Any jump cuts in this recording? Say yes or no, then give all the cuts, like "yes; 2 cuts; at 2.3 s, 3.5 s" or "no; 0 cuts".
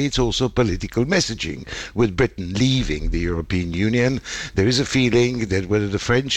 no; 0 cuts